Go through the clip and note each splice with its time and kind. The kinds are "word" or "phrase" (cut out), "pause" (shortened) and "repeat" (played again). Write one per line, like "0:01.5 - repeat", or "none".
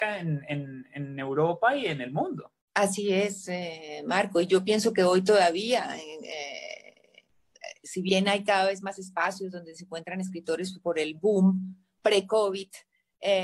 0:02.6 - pause